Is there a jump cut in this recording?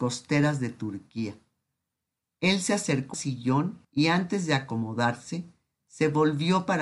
yes; 2 cuts; at 3.1 s, 3.8 s

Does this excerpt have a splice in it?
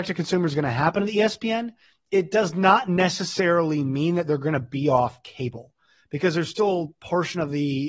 no; 0 cuts

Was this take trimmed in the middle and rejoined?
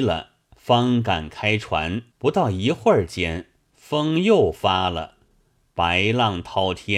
yes; 1 cut; at 2.1 s

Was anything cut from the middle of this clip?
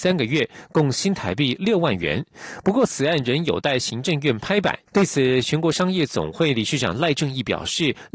yes; 1 cut; at 4.9 s

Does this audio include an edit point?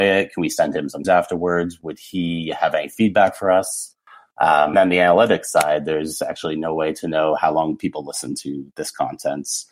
yes; 2 cuts; at 1.0 s, 4.7 s

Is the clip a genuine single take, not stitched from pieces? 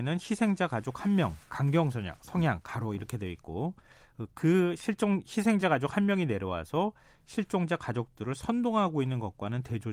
yes; 0 cuts

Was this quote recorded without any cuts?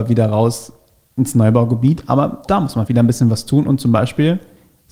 no; 2 cuts; at 2.4 s, 2.9 s

